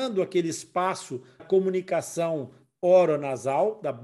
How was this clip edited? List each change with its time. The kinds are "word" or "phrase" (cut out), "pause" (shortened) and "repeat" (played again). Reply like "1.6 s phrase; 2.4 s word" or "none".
1.4 s word